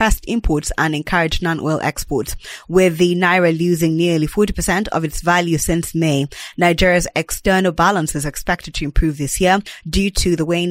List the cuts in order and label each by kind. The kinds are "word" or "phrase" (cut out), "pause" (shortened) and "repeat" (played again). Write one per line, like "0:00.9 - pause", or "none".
none